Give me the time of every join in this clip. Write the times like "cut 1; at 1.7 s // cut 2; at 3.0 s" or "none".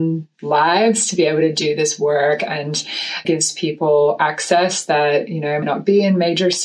cut 1; at 3.2 s // cut 2; at 5.6 s